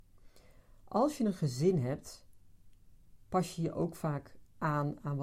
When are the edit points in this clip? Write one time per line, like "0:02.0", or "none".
none